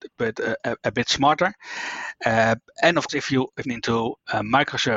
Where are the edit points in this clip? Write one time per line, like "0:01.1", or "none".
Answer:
0:03.1
0:03.6